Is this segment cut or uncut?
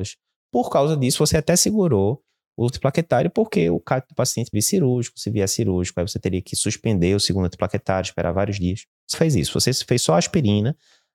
cut